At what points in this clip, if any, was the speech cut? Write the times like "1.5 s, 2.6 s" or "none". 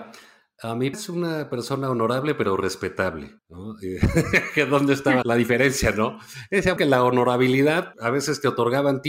0.9 s, 3.4 s, 5.2 s, 6.8 s, 7.9 s